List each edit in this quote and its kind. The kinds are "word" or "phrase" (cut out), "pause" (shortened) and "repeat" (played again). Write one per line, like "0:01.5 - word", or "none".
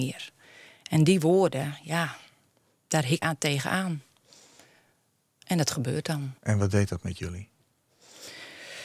0:03.2 - word
0:06.4 - pause